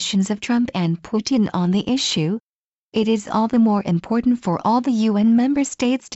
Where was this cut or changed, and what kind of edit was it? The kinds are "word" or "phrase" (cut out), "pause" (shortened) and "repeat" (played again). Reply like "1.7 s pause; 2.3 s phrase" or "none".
none